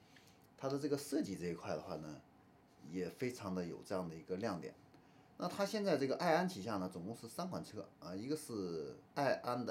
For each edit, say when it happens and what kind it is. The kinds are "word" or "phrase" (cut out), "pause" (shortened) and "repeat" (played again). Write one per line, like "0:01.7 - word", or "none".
none